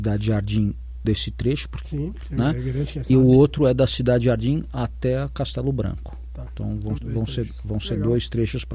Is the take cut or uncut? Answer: cut